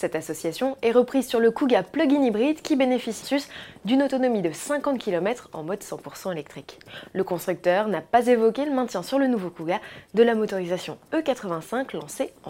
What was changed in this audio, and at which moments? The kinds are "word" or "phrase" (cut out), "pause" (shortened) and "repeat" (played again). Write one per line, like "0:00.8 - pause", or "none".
0:03.2 - word